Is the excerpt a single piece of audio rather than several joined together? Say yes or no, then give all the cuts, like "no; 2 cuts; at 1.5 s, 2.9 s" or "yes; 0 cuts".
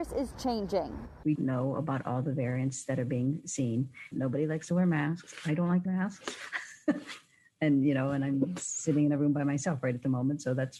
no; 2 cuts; at 1.4 s, 5.9 s